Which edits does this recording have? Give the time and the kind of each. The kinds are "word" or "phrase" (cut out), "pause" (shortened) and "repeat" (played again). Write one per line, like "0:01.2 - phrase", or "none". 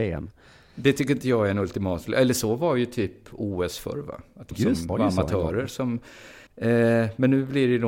0:04.5 - phrase
0:04.9 - phrase
0:06.5 - pause